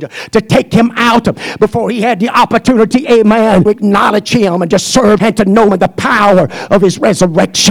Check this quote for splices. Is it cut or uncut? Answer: cut